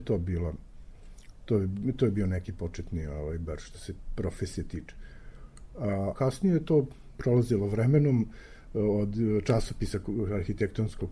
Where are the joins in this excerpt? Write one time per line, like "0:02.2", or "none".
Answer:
0:06.1

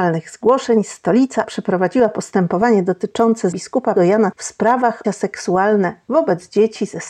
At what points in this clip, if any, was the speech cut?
0:01.4
0:03.5
0:04.0
0:04.3
0:05.0

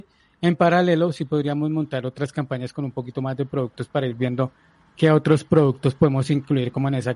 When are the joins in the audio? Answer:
none

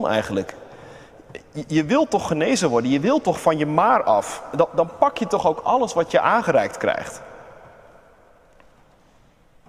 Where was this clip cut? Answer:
none

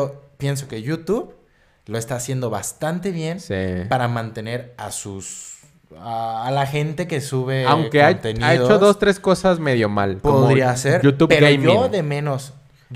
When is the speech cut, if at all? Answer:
none

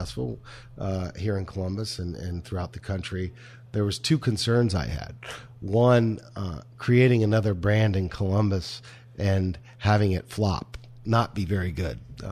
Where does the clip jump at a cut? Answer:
none

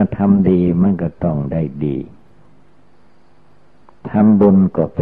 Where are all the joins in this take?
none

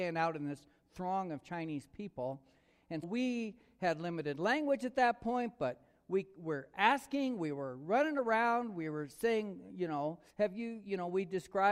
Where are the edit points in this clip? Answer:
0:03.0
0:10.3

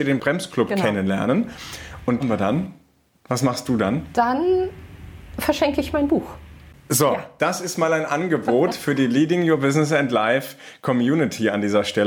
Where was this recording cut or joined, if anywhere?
0:02.2

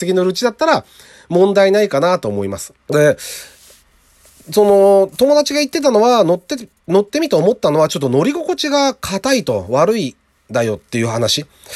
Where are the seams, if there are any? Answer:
0:02.8

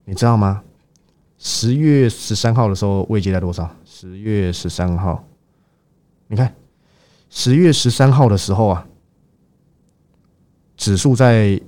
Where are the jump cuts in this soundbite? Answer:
none

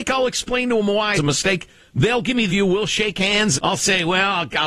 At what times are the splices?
0:01.1
0:02.5
0:03.5

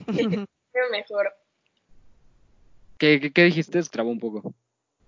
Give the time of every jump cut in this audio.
0:03.9

